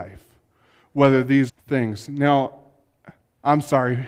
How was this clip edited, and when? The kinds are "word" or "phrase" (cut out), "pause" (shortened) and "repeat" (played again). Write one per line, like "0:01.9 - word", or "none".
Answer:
0:01.5 - word